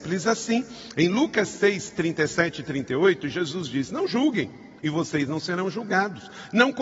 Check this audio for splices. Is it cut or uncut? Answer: cut